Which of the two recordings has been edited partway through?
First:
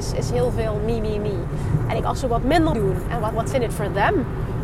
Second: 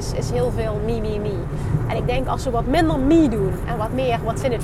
first; 3 cuts; at 2.0 s, 2.7 s, 3.3 s

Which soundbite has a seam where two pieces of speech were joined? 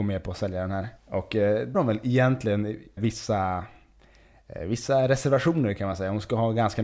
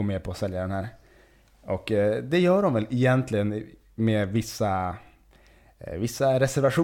first; 3 cuts; at 1.0 s, 1.7 s, 3.0 s

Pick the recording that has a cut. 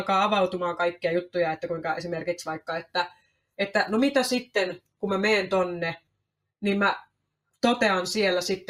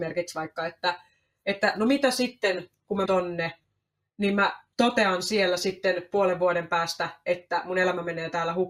second; 2 cuts; at 3.1 s, 4.7 s

